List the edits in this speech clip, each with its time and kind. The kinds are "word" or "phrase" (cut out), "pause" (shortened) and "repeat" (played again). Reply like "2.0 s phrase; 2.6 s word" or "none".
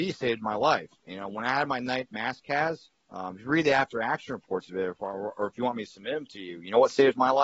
3.0 s pause